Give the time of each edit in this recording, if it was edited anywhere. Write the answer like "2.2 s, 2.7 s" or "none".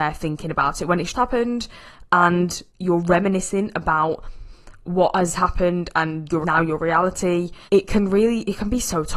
1.1 s, 2.7 s, 6.4 s, 7.6 s